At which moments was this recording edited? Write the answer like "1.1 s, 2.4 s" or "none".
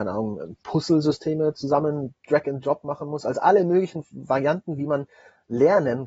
2.2 s